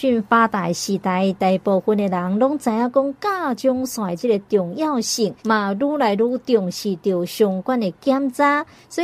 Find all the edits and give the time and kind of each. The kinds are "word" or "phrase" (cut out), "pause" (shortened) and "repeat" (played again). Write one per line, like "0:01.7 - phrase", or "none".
0:05.4 - pause